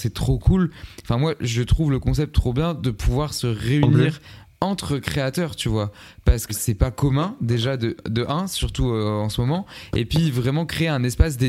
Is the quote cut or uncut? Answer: cut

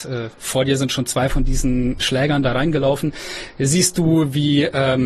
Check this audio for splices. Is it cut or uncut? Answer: cut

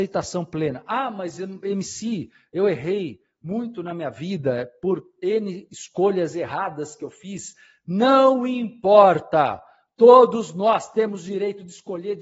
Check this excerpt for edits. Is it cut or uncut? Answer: uncut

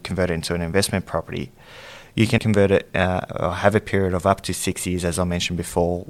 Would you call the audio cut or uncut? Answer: cut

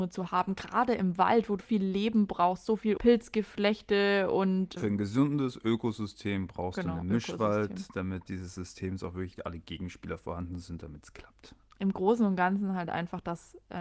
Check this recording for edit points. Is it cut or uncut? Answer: cut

